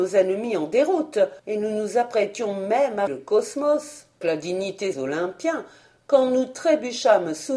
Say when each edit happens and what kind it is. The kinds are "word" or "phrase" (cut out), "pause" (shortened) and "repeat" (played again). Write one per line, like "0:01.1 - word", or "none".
0:01.4 - pause
0:03.1 - word
0:04.2 - word
0:04.9 - phrase